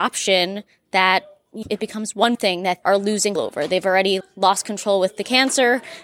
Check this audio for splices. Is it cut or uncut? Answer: cut